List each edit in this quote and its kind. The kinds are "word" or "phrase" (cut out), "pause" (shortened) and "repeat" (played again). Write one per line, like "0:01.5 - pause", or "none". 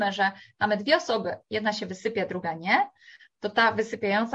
none